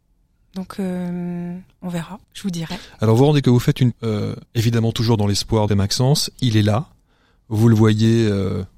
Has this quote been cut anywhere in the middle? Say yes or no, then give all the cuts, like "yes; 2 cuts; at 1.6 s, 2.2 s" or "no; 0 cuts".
yes; 5 cuts; at 2.2 s, 3.4 s, 3.9 s, 4.4 s, 5.7 s